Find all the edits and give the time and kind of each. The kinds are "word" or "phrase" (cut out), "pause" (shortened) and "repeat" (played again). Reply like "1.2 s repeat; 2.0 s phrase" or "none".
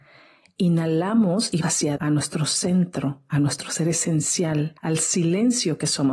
1.6 s word; 2.0 s word; 4.8 s pause